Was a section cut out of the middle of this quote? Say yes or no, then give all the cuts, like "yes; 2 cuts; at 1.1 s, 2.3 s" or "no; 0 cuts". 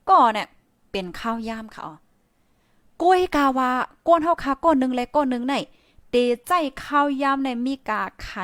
no; 0 cuts